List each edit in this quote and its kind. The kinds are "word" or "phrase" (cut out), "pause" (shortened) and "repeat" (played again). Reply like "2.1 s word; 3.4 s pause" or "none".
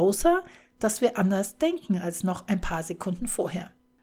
none